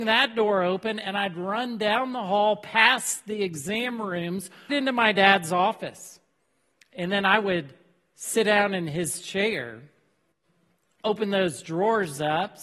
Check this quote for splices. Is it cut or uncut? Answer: cut